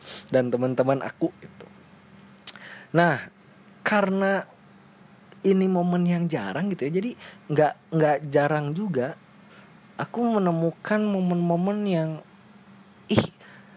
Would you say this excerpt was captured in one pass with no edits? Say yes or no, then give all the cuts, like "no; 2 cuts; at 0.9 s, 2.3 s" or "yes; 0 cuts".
yes; 0 cuts